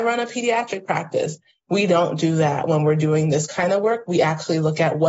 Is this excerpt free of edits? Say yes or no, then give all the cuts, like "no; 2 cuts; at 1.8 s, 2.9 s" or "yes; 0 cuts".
yes; 0 cuts